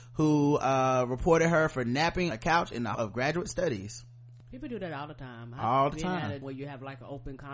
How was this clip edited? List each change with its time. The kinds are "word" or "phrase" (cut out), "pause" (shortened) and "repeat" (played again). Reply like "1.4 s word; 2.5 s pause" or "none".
2.3 s word; 2.9 s word; 6.4 s word